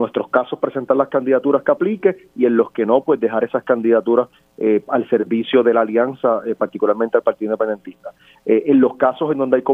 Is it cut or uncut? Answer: uncut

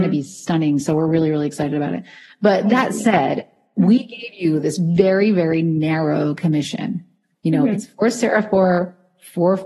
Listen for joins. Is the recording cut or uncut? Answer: uncut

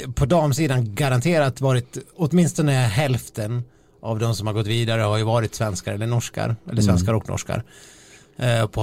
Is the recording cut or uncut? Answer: uncut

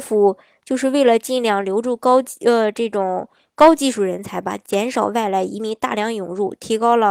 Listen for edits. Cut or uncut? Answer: uncut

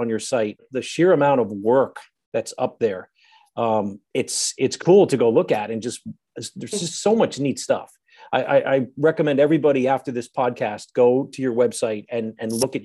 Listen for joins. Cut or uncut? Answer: uncut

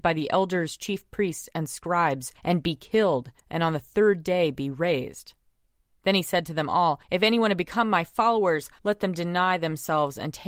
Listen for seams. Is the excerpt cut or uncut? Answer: cut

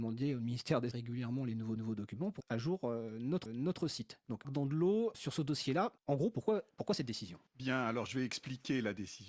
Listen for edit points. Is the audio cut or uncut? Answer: cut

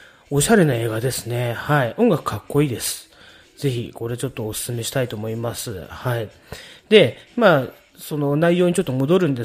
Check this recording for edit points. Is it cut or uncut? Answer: uncut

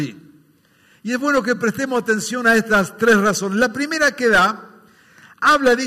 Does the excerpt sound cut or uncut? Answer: uncut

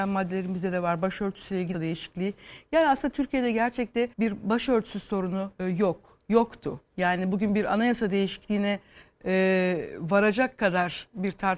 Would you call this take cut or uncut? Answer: cut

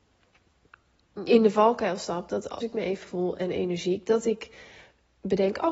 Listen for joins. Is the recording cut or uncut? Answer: cut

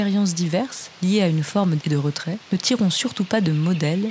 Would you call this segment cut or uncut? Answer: cut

